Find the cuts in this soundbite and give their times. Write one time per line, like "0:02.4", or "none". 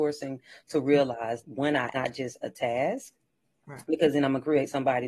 0:01.4
0:01.9
0:02.4